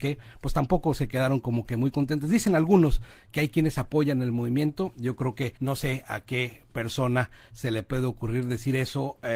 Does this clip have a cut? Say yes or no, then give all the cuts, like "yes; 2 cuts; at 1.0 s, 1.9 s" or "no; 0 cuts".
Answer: yes; 1 cut; at 5.6 s